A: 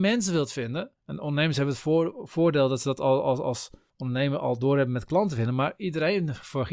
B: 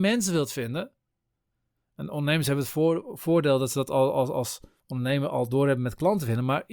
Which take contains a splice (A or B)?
A